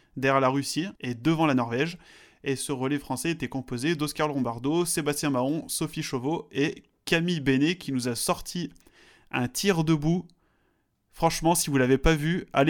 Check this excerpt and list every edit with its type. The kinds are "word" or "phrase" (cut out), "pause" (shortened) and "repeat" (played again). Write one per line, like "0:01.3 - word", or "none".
0:01.0 - pause